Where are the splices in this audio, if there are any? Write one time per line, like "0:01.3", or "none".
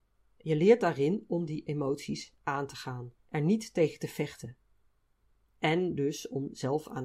0:03.2